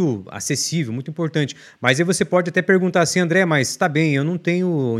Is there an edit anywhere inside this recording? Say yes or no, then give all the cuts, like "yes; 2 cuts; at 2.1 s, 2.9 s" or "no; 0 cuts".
no; 0 cuts